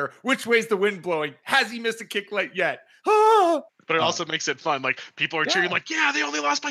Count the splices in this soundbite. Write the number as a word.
one